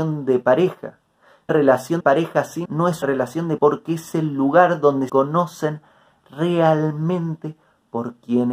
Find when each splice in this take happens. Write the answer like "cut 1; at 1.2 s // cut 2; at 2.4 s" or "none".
cut 1; at 1.5 s // cut 2; at 2.0 s // cut 3; at 2.6 s // cut 4; at 3.0 s // cut 5; at 3.6 s // cut 6; at 5.1 s